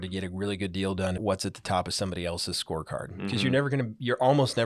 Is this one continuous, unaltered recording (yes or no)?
no